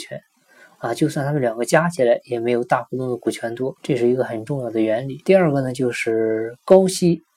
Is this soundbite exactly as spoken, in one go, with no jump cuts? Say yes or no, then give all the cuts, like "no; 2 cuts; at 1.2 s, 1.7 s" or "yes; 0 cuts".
no; 2 cuts; at 3.8 s, 5.2 s